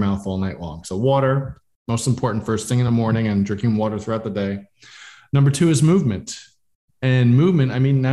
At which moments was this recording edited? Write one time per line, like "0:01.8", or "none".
none